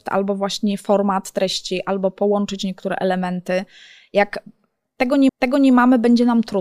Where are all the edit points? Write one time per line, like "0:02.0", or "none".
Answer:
0:05.3